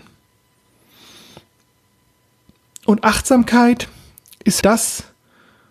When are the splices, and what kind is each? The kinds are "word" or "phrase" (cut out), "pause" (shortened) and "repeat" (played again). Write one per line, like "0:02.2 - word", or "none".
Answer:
0:04.6 - word